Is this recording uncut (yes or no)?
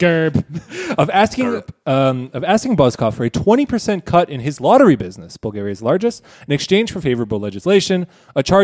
yes